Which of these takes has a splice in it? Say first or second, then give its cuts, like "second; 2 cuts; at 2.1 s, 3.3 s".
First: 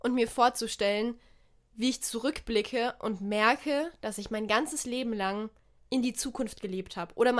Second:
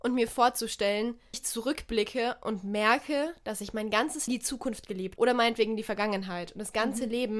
second; 3 cuts; at 1.3 s, 4.3 s, 5.2 s